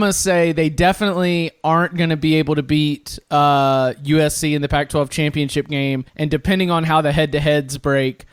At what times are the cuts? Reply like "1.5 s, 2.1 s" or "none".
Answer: 6.1 s